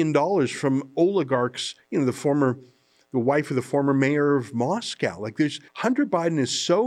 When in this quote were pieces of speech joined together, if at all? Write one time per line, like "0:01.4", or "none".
0:05.7